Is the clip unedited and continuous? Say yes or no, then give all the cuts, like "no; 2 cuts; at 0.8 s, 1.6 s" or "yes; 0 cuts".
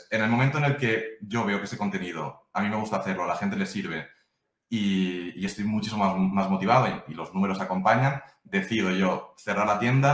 yes; 0 cuts